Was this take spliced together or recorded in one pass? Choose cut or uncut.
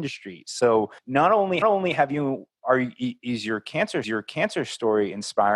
cut